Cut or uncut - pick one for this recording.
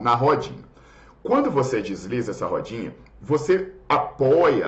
uncut